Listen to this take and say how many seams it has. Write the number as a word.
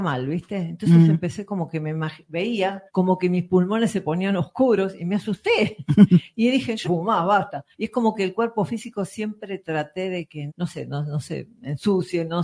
four